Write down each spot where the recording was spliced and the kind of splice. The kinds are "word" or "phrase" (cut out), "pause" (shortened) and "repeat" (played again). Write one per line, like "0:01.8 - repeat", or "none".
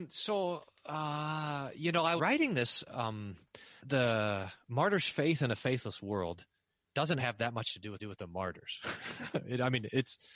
0:02.2 - word
0:03.8 - word
0:07.2 - word
0:08.0 - repeat